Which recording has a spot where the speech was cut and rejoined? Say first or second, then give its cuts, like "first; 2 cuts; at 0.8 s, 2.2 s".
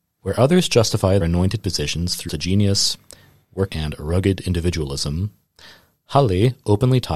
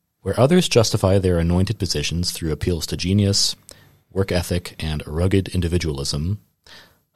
first; 3 cuts; at 1.2 s, 2.3 s, 3.7 s